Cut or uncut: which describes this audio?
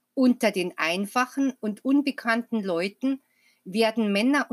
uncut